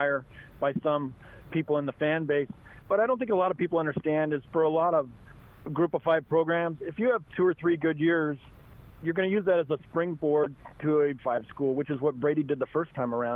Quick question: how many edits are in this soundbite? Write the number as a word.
three